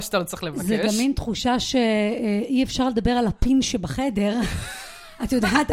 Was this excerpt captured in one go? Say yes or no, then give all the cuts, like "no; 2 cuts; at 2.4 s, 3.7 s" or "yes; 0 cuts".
yes; 0 cuts